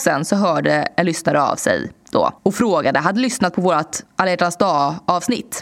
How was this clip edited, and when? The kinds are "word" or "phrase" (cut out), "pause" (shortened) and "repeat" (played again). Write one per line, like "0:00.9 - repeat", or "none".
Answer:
0:02.4 - pause
0:04.1 - pause